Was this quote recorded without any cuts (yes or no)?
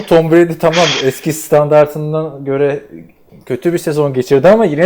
yes